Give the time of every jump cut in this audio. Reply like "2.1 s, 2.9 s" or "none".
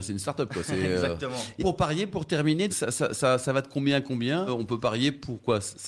1.6 s, 2.7 s, 4.5 s